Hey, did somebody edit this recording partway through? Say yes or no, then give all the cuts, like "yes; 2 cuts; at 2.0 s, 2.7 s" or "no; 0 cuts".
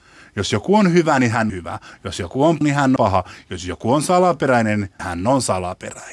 yes; 4 cuts; at 1.5 s, 2.6 s, 3.0 s, 5.0 s